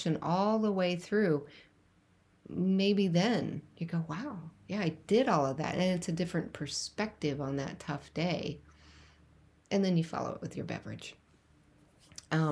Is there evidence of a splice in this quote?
no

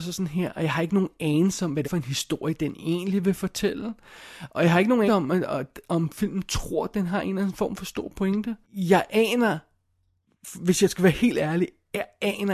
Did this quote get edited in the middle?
yes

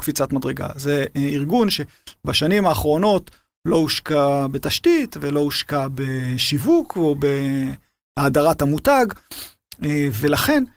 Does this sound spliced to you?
no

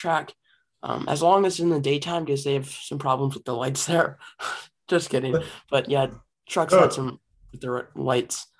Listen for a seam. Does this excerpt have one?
no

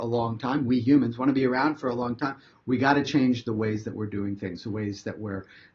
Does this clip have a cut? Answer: no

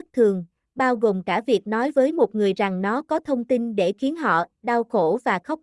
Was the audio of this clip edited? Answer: no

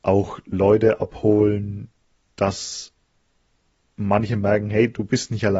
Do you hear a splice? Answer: no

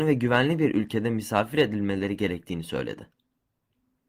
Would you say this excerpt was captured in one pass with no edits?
yes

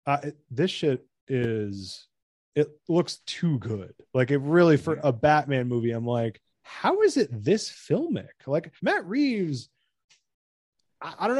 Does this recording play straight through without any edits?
no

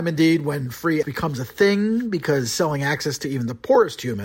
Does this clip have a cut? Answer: yes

